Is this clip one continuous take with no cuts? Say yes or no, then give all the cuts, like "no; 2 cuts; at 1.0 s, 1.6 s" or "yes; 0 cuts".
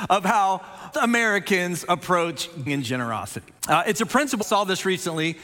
no; 4 cuts; at 0.9 s, 2.7 s, 3.6 s, 4.4 s